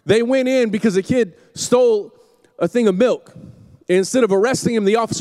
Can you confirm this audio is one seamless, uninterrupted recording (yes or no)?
yes